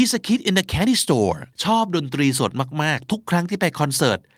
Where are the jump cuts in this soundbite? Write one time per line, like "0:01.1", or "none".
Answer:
0:01.5

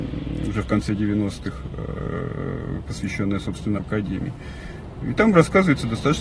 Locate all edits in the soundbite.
0:02.8
0:03.8

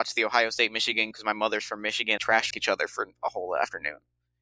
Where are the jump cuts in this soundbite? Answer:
0:01.1
0:02.2
0:02.5

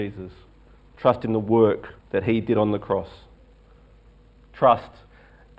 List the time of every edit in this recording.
0:02.0

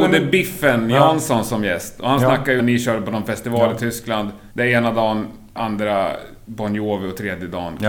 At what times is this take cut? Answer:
0:02.6
0:04.5
0:05.6

